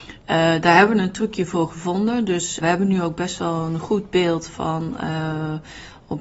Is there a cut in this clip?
yes; 1 cut; at 2.6 s

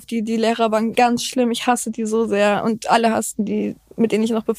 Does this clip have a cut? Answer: yes; 1 cut; at 0.9 s

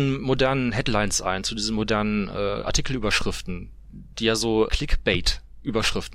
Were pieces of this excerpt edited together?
yes; 1 cut; at 4.7 s

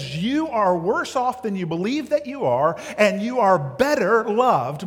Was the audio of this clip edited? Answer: no; 0 cuts

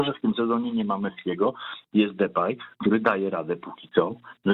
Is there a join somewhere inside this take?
no; 0 cuts

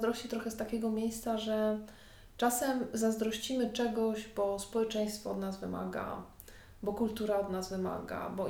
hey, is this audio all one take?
yes; 0 cuts

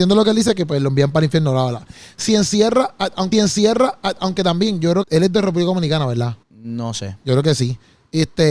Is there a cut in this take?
yes; 3 cuts; at 3.3 s, 5.0 s, 6.4 s

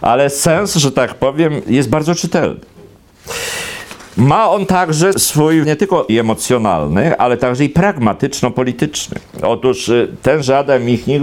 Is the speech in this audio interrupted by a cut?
yes; 4 cuts; at 1.6 s, 5.1 s, 5.6 s, 6.1 s

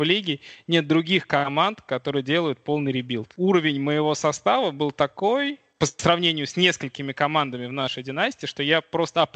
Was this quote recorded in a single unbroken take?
no; 2 cuts; at 3.3 s, 5.7 s

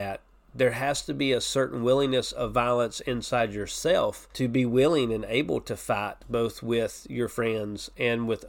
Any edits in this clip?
yes; 1 cut; at 4.3 s

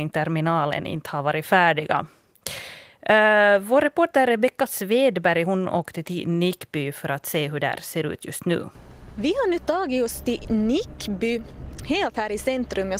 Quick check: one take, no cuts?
yes; 0 cuts

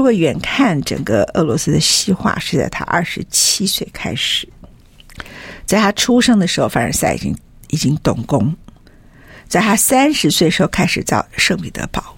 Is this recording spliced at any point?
no; 0 cuts

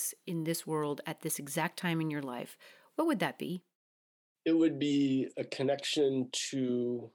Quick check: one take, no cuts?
yes; 0 cuts

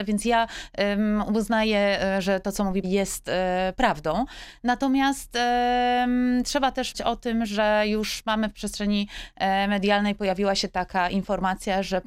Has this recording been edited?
yes; 2 cuts; at 2.8 s, 6.9 s

